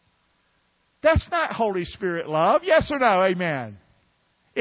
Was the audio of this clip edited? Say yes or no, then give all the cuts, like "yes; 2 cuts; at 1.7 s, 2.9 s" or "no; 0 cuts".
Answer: no; 0 cuts